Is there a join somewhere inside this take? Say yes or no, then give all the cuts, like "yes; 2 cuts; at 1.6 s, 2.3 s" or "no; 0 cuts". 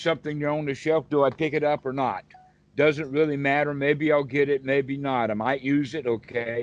no; 0 cuts